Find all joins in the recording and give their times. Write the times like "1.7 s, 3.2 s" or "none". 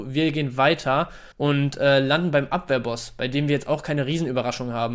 1.3 s

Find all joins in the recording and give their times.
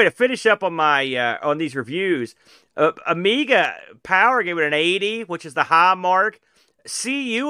none

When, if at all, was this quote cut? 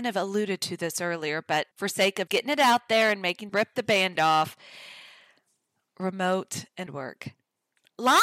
1.7 s, 2.3 s, 3.5 s, 4.2 s, 6.9 s

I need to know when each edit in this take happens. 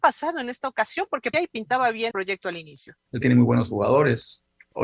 1.3 s, 2.1 s, 3.2 s

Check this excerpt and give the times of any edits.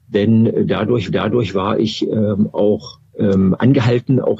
1.1 s, 3.1 s

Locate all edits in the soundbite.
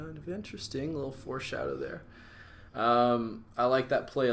2.7 s

